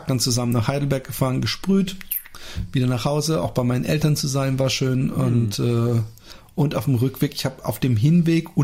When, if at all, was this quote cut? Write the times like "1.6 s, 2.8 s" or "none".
none